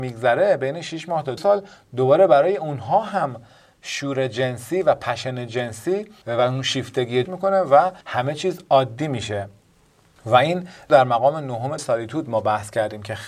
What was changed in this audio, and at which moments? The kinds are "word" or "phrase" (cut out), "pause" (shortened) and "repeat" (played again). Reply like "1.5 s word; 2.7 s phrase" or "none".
1.4 s word; 7.3 s phrase; 8.0 s pause; 11.8 s word